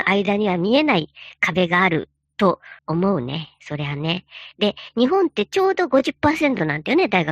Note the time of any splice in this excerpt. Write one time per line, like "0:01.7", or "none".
0:02.8